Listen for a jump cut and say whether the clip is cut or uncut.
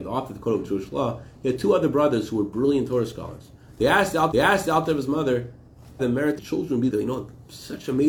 cut